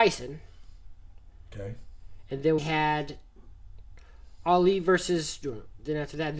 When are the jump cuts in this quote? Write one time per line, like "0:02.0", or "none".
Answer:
0:02.6